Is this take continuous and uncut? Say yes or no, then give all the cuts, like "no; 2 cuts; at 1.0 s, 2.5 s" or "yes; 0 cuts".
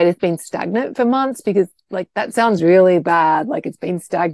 yes; 0 cuts